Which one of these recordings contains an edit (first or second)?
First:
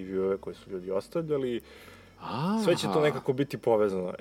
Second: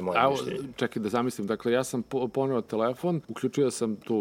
second